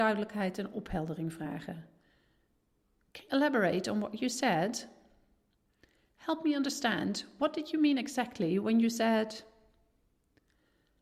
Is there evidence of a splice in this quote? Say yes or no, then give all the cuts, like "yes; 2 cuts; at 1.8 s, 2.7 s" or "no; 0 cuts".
yes; 1 cut; at 3.3 s